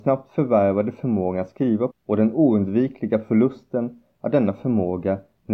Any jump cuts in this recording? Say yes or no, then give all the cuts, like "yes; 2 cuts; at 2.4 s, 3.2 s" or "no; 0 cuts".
yes; 1 cut; at 1.9 s